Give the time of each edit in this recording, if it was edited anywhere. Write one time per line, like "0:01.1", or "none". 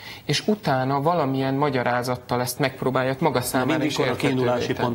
0:02.6
0:03.2